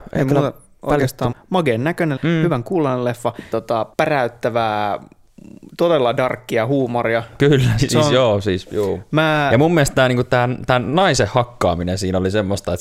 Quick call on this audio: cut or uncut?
cut